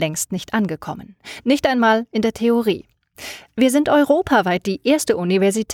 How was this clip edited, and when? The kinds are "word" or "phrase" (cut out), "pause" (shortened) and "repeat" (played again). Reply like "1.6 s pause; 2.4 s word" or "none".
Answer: none